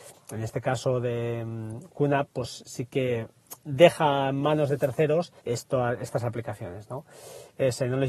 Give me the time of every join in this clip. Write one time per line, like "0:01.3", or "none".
0:05.4

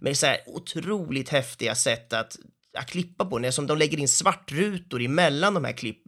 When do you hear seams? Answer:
none

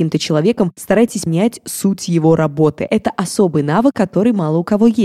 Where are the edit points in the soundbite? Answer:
0:01.3

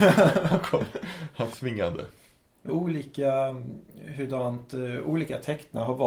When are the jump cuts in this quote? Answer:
0:01.5
0:02.7

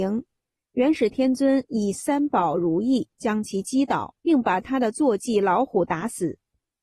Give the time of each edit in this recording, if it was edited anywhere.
0:04.2

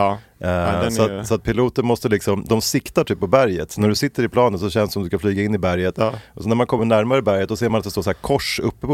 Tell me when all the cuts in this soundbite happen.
none

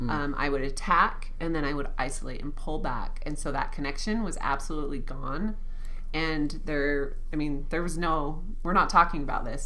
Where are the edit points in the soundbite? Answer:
none

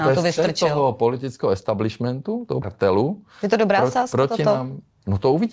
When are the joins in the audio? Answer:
0:02.6

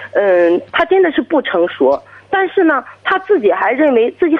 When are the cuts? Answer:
none

